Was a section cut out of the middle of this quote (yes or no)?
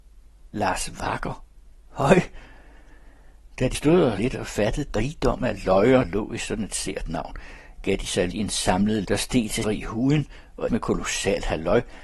yes